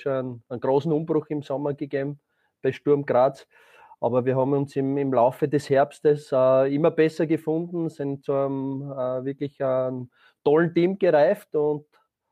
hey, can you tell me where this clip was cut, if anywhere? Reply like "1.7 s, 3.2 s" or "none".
none